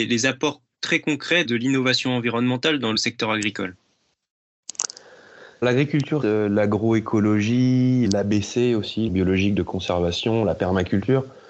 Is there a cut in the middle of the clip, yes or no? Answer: yes